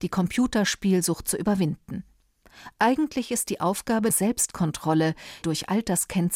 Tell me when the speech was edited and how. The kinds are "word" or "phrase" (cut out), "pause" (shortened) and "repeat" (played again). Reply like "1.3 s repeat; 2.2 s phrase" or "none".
3.4 s word; 4.1 s phrase; 5.4 s word